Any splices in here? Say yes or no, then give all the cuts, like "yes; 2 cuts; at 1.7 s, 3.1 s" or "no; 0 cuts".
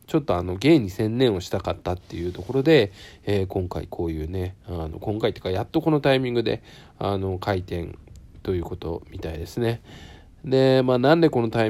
no; 0 cuts